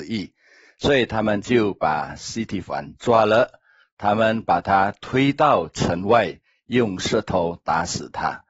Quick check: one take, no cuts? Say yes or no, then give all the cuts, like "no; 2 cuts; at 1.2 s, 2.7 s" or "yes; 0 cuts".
yes; 0 cuts